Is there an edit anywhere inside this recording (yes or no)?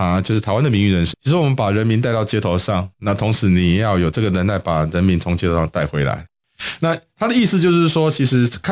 yes